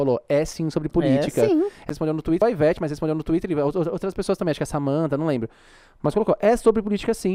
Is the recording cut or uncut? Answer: uncut